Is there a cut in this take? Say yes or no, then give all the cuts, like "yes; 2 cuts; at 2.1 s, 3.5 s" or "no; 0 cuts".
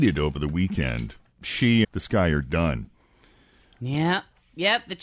yes; 2 cuts; at 1.3 s, 1.8 s